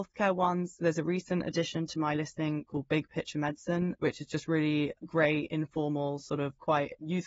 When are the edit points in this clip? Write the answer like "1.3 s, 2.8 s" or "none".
5.0 s